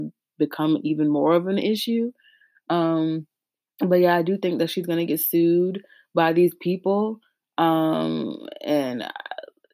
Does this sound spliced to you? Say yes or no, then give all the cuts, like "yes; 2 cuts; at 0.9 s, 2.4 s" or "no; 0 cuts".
no; 0 cuts